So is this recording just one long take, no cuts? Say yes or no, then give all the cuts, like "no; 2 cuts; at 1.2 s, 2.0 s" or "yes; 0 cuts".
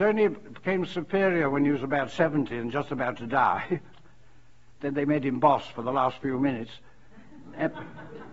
yes; 0 cuts